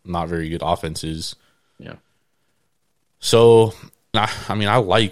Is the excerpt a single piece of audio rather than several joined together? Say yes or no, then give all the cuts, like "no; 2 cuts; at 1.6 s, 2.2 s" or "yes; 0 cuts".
no; 1 cut; at 4.1 s